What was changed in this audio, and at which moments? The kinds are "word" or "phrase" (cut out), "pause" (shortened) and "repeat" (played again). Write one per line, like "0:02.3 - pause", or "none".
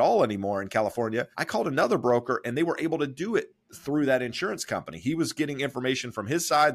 0:01.3 - pause